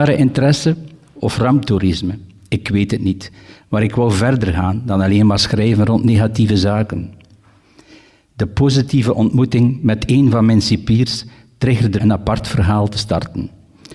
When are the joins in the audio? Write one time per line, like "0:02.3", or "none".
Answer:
0:12.0